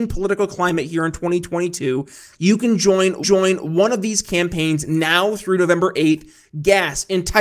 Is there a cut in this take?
yes; 1 cut; at 3.2 s

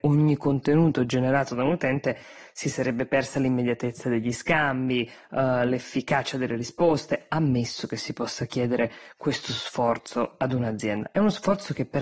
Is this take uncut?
yes; 0 cuts

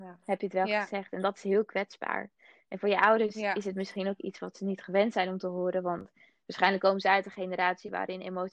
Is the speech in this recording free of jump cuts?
yes; 0 cuts

